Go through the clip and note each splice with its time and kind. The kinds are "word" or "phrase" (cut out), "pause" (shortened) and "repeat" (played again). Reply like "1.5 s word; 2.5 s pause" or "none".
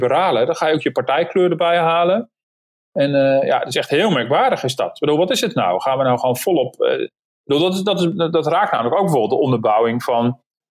none